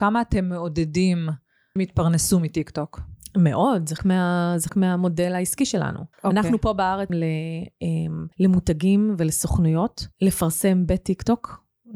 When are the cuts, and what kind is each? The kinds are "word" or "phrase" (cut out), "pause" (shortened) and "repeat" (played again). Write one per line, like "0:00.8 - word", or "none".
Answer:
0:01.8 - phrase
0:04.0 - word
0:04.7 - word
0:06.1 - pause
0:07.1 - word
0:08.3 - pause
0:10.1 - pause